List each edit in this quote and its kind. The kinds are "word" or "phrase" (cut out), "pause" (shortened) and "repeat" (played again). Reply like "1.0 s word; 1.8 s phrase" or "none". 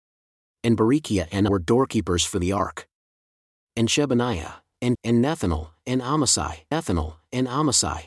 1.5 s word; 4.9 s word; 6.7 s repeat

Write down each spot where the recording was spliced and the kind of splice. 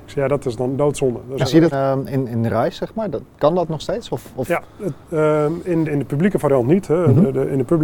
1.7 s word; 2.1 s word; 5.8 s word

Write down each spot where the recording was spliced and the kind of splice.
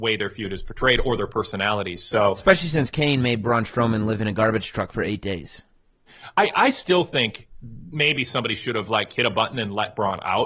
none

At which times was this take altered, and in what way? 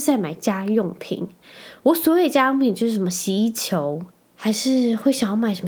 4.1 s pause

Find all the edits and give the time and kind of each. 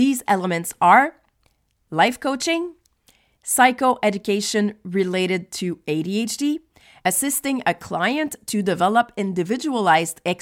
none

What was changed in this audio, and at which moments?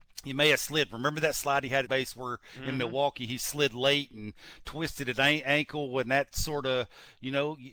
1.9 s phrase

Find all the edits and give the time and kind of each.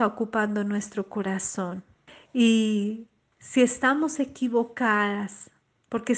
2.1 s pause

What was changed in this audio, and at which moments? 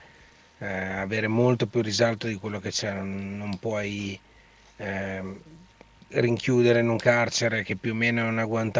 none

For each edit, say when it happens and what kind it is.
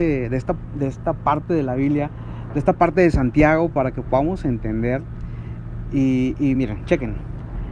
none

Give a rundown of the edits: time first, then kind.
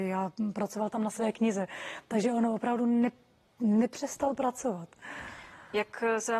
none

